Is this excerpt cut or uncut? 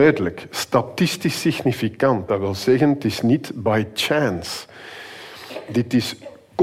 uncut